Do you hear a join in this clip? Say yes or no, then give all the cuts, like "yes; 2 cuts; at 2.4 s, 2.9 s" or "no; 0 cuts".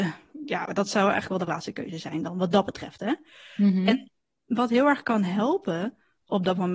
no; 0 cuts